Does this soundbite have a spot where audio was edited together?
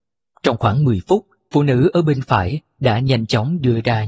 yes; 1 cut; at 1.5 s

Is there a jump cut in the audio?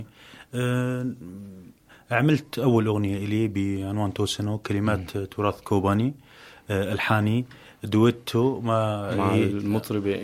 no; 0 cuts

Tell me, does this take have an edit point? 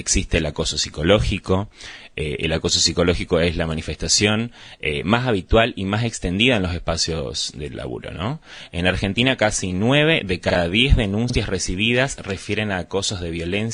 no; 0 cuts

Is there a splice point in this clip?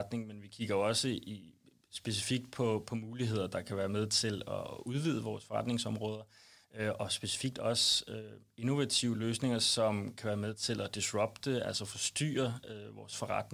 no; 0 cuts

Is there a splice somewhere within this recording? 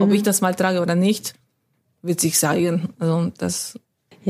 no; 0 cuts

